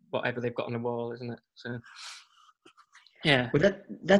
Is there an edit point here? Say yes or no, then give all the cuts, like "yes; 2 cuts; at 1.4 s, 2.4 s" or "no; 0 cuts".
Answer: no; 0 cuts